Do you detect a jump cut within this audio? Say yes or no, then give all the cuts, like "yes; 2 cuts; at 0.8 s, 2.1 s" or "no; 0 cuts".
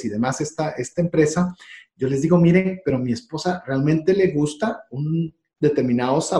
no; 0 cuts